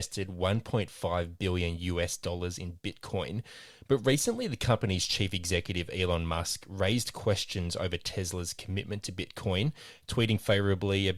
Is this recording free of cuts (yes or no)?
yes